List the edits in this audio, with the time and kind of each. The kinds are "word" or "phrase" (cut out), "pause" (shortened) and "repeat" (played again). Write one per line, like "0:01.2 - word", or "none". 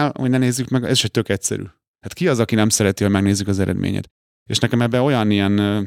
none